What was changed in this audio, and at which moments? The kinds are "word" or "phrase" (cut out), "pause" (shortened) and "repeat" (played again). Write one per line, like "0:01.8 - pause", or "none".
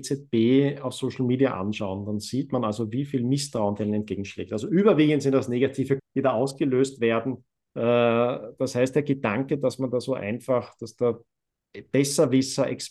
0:06.0 - word